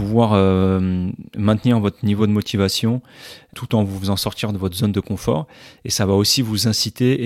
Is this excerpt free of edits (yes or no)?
yes